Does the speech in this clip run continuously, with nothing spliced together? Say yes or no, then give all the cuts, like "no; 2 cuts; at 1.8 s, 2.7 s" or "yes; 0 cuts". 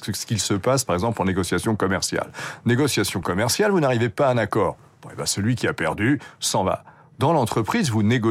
yes; 0 cuts